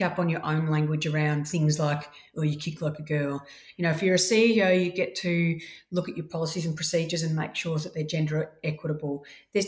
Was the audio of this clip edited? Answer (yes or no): no